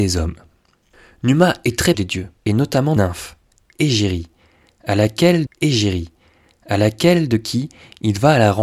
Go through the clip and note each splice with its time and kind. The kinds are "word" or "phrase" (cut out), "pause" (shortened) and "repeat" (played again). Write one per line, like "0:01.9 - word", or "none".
0:01.9 - word
0:02.4 - pause
0:03.0 - word
0:05.5 - repeat